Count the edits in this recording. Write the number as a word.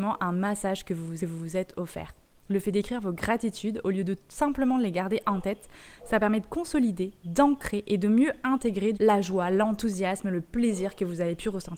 two